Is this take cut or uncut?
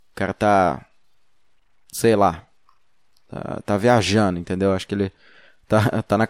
uncut